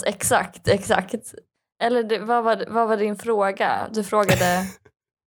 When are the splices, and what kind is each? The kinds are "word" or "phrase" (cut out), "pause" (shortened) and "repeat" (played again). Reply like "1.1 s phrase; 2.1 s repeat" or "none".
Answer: 1.5 s pause